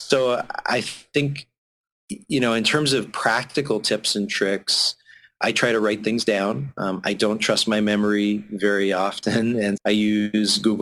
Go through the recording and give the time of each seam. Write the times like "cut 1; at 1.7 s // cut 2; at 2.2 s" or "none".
cut 1; at 9.8 s